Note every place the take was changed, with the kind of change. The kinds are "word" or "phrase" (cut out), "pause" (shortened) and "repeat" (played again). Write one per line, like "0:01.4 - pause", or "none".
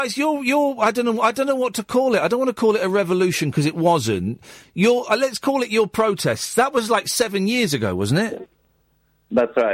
none